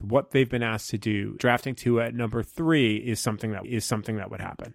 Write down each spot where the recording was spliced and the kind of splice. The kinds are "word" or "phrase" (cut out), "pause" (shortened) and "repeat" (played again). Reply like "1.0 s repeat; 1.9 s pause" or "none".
1.4 s word; 3.6 s repeat

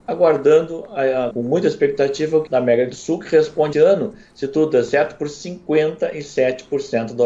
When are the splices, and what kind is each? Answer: 1.3 s word; 2.5 s word; 3.7 s word

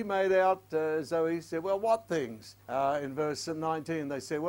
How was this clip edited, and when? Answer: 2.6 s pause

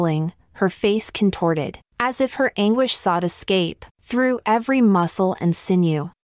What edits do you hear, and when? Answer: 1.9 s pause; 3.9 s pause

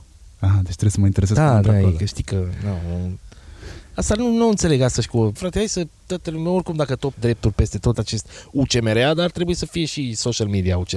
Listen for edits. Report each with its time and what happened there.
5.4 s word; 7.1 s word; 7.9 s word

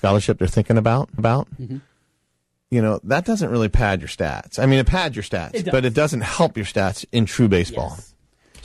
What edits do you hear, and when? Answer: 1.2 s repeat

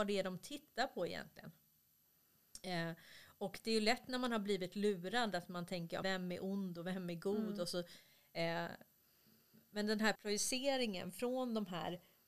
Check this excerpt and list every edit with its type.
6.0 s word; 10.2 s word

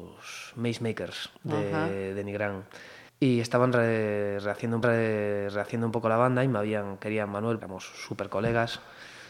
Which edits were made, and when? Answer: 1.3 s pause; 3.1 s pause; 4.8 s repeat; 7.6 s word

